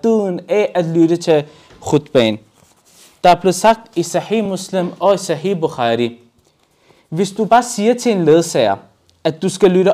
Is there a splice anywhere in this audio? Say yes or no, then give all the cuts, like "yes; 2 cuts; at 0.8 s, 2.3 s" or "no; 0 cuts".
no; 0 cuts